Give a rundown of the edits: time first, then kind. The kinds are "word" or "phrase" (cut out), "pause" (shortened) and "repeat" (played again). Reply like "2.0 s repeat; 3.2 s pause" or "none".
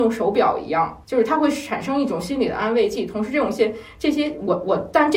1.0 s pause